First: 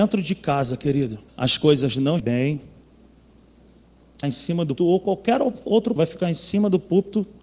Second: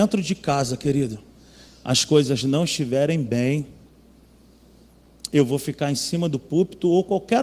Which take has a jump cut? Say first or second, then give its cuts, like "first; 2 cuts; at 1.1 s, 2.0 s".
first; 5 cuts; at 1.3 s, 2.2 s, 4.2 s, 4.8 s, 6.0 s